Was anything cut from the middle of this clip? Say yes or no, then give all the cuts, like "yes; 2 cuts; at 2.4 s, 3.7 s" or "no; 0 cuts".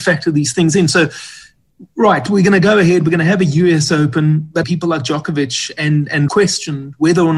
yes; 2 cuts; at 4.6 s, 6.3 s